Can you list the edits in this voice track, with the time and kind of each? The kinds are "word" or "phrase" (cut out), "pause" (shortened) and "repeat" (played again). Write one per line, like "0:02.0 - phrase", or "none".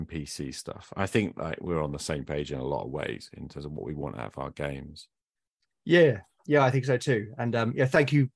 none